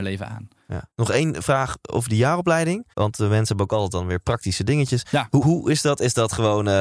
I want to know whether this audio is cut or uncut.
cut